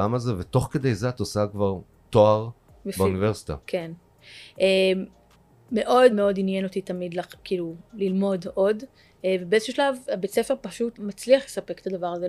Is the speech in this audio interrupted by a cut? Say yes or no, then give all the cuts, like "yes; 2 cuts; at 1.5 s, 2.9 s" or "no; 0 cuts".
yes; 2 cuts; at 6.1 s, 10.9 s